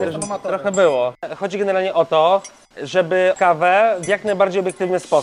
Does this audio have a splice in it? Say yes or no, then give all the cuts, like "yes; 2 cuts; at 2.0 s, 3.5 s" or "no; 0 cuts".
yes; 1 cut; at 3.3 s